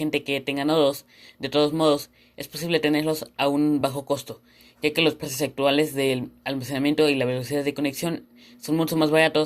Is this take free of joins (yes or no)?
yes